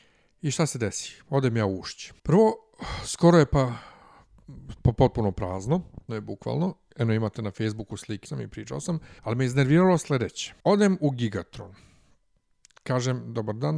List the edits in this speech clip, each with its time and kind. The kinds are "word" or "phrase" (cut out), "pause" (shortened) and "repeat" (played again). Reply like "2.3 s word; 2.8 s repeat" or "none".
2.2 s pause; 6.1 s word; 8.3 s word; 9.2 s pause; 10.6 s pause